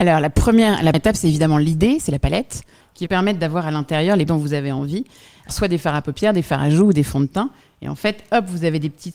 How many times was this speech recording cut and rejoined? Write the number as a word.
four